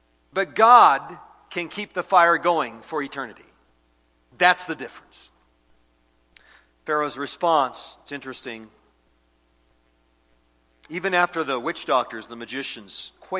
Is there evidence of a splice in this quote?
no; 0 cuts

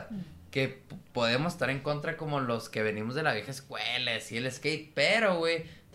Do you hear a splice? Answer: no; 0 cuts

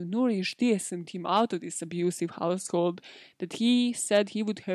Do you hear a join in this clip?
yes; 1 cut; at 1.1 s

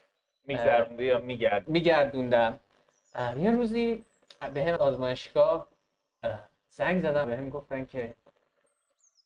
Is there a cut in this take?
yes; 3 cuts; at 1.6 s, 4.8 s, 7.2 s

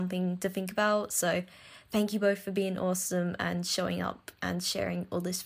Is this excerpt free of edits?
yes; 0 cuts

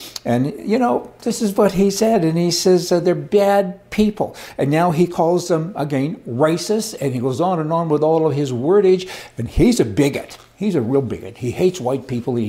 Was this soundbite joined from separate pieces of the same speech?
no; 0 cuts

